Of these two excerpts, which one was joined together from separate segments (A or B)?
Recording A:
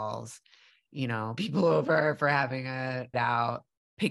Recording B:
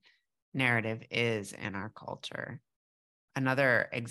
A